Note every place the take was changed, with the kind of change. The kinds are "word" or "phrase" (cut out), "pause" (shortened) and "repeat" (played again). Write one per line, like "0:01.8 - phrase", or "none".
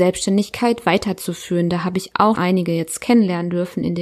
0:02.3 - word